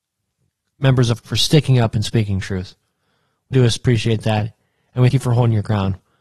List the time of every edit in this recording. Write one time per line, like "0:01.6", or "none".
0:01.2
0:03.5
0:05.1